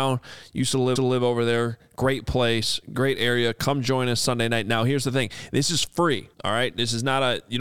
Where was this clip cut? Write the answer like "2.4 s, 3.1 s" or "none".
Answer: 1.0 s, 6.3 s